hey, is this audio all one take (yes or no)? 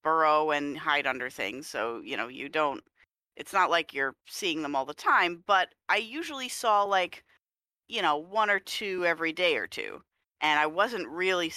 yes